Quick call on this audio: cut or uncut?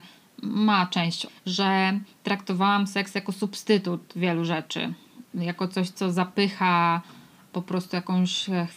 cut